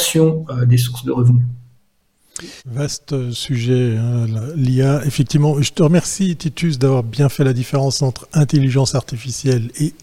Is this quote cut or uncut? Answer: cut